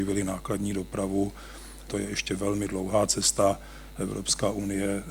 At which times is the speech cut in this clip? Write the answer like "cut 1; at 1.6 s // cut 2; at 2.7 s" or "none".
cut 1; at 1.9 s